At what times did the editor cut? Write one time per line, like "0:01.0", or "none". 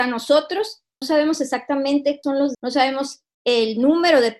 0:01.0
0:02.2
0:02.5